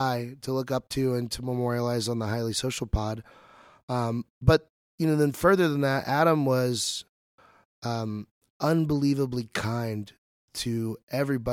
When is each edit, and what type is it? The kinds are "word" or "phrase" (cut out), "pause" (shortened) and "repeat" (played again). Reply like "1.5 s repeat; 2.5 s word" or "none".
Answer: none